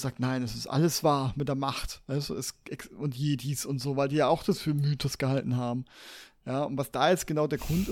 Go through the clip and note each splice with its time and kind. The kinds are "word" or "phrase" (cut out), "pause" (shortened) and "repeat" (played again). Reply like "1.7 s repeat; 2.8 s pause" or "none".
none